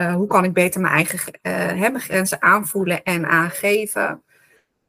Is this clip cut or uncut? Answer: uncut